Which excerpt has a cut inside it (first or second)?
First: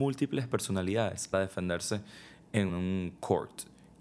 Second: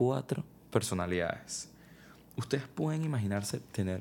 first